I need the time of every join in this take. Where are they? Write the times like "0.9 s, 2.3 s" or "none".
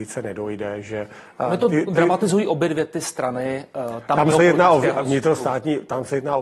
none